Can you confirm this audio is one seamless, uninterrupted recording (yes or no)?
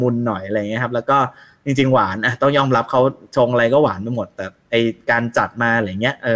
yes